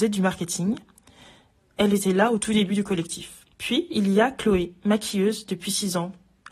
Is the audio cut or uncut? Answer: cut